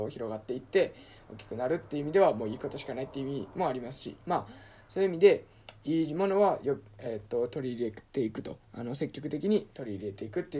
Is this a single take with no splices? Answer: no; 2 cuts; at 4.2 s, 8.6 s

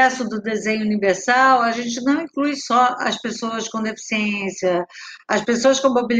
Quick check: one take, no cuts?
yes; 0 cuts

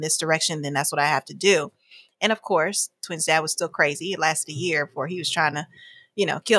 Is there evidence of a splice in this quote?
no; 0 cuts

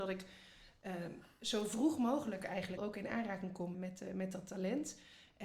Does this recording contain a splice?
yes; 2 cuts; at 2.8 s, 3.7 s

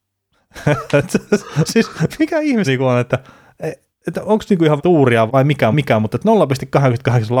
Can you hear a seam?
yes; 6 cuts; at 2.2 s, 2.6 s, 3.9 s, 4.8 s, 5.3 s, 5.7 s

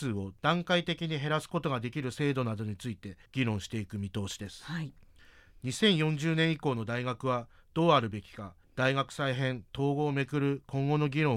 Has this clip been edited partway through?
yes; 2 cuts; at 3.3 s, 8.6 s

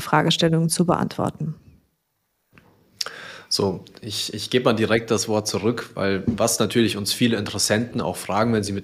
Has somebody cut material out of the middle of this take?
no; 0 cuts

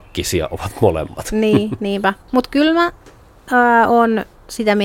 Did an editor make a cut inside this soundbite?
yes; 1 cut; at 2.2 s

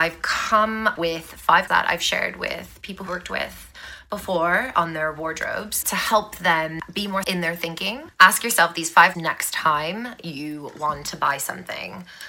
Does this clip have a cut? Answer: yes; 6 cuts; at 1.0 s, 1.7 s, 3.1 s, 5.8 s, 7.2 s, 9.1 s

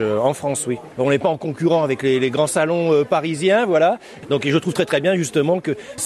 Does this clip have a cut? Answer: no; 0 cuts

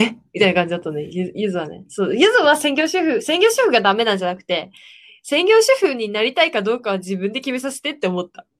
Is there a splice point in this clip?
no; 0 cuts

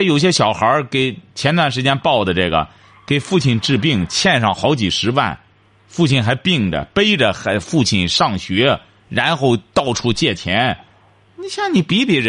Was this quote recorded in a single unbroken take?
yes; 0 cuts

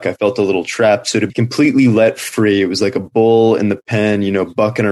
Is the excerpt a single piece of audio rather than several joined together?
no; 1 cut; at 1.3 s

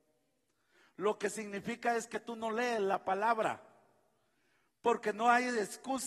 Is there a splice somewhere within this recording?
no; 0 cuts

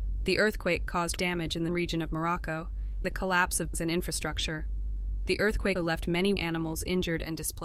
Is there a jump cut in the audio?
yes; 6 cuts; at 1.2 s, 1.7 s, 3.0 s, 3.7 s, 5.8 s, 6.4 s

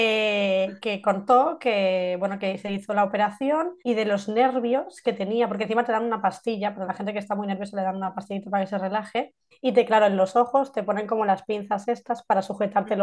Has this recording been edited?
yes; 2 cuts; at 3.8 s, 9.5 s

